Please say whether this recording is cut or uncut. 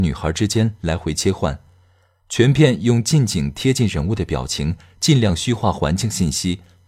uncut